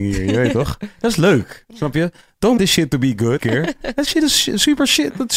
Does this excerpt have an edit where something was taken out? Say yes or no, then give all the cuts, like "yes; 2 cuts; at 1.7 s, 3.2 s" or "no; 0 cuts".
yes; 2 cuts; at 2.6 s, 3.4 s